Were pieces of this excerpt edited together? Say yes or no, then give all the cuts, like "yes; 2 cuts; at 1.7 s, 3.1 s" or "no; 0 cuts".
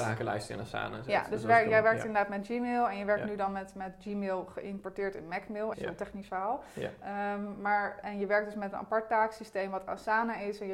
yes; 2 cuts; at 5.7 s, 8.0 s